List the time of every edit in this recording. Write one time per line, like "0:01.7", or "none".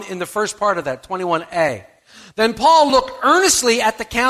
none